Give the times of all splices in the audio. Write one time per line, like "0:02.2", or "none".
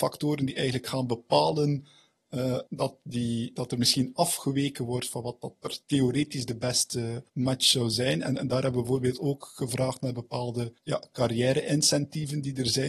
0:02.7
0:05.8
0:07.3
0:10.8